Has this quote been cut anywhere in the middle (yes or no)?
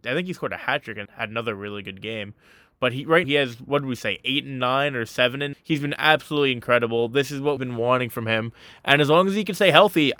yes